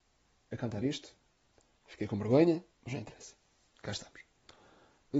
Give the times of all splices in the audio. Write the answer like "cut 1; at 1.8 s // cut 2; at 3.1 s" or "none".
cut 1; at 2.7 s